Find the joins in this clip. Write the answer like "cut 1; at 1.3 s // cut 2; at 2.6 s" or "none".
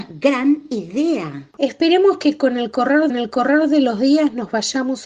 cut 1; at 3.1 s